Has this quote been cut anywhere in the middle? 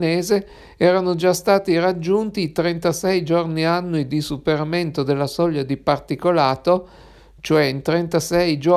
no; 0 cuts

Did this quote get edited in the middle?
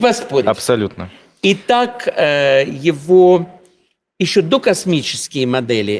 no; 0 cuts

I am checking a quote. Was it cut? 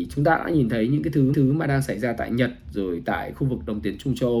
yes; 1 cut; at 1.3 s

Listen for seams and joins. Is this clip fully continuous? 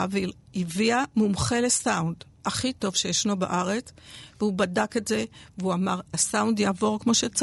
yes; 0 cuts

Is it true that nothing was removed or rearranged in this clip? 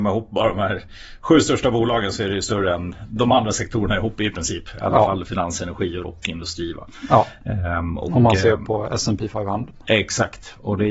no; 1 cut; at 6.0 s

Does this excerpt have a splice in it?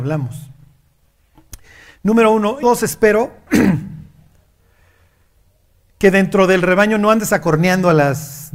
yes; 1 cut; at 2.6 s

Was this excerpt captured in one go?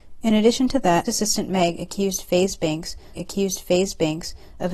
no; 2 cuts; at 1.1 s, 3.1 s

